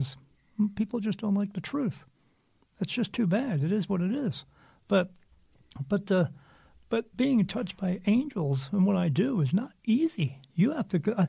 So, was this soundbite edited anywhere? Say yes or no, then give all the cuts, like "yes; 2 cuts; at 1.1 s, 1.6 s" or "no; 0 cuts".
no; 0 cuts